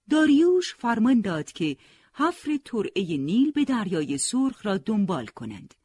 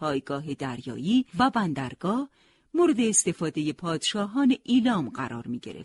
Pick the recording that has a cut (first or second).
second